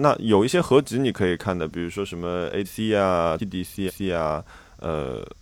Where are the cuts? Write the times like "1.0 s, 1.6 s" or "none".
2.6 s, 3.4 s, 3.9 s